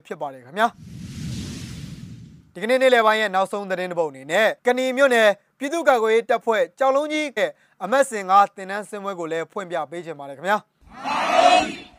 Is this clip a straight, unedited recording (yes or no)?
no